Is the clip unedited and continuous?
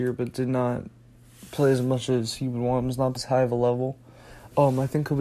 no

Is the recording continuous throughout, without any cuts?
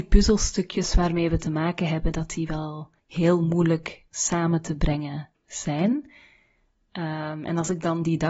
no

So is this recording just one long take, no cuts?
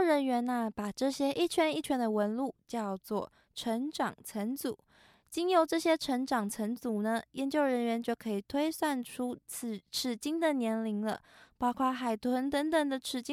yes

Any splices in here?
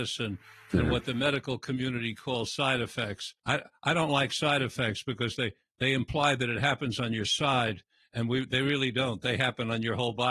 yes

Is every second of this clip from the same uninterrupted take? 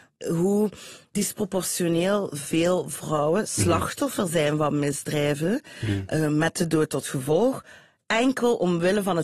yes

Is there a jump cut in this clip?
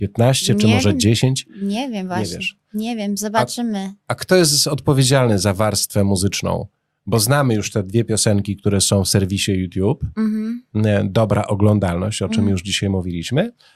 no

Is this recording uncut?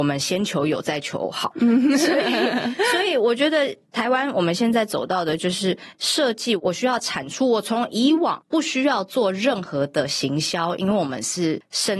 no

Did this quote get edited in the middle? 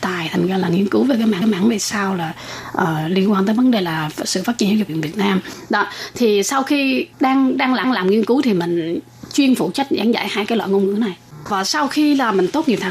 yes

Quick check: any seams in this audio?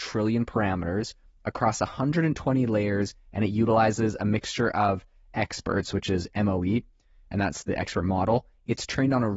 no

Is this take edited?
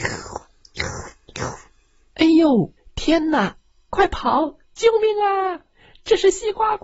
yes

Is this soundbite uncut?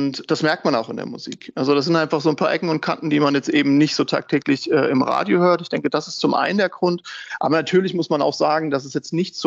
yes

